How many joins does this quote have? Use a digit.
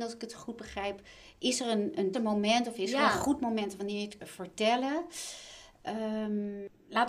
2